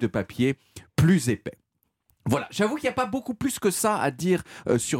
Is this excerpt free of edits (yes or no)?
yes